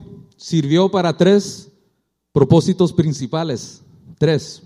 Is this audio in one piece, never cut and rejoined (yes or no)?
yes